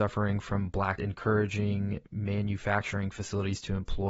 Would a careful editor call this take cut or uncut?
cut